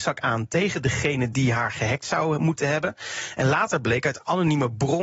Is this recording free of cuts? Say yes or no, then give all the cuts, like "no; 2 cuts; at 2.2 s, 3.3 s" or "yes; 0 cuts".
yes; 0 cuts